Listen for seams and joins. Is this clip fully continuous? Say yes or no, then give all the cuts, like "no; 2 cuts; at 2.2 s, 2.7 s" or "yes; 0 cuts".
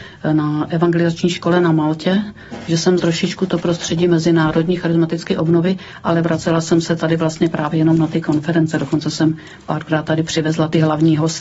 no; 1 cut; at 3.0 s